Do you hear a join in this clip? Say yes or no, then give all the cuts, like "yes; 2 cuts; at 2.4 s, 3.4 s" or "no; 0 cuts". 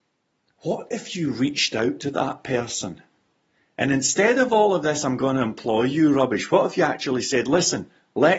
no; 0 cuts